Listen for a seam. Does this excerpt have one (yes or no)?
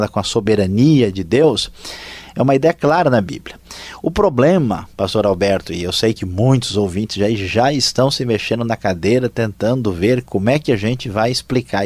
no